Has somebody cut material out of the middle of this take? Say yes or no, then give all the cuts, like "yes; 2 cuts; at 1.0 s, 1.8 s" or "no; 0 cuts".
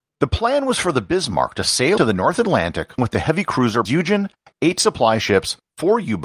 yes; 3 cuts; at 2.0 s, 3.0 s, 3.9 s